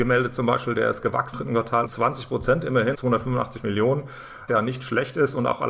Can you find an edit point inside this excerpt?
yes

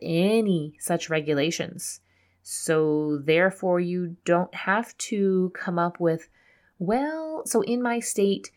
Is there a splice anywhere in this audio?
no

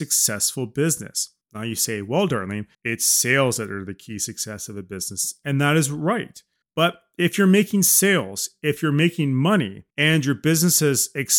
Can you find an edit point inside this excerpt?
yes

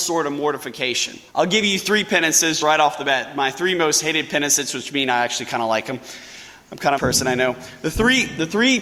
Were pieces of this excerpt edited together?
yes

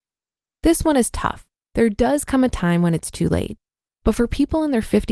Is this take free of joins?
yes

